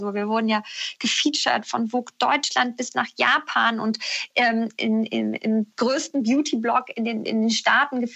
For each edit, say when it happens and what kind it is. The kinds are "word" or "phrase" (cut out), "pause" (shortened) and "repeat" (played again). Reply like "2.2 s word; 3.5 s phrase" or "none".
none